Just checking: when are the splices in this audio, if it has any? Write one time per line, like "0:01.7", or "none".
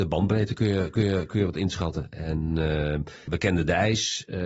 0:01.0
0:03.3